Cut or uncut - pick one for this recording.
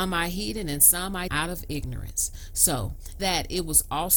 cut